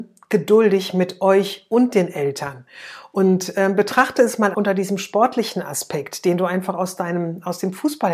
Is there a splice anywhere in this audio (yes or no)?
yes